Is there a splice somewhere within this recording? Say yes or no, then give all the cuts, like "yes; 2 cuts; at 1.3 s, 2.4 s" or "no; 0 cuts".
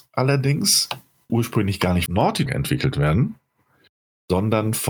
yes; 3 cuts; at 1.3 s, 2.1 s, 2.5 s